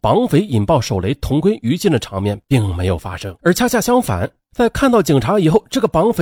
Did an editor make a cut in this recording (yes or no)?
yes